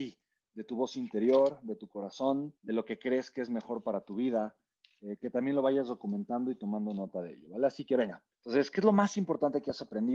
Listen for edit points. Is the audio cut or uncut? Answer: cut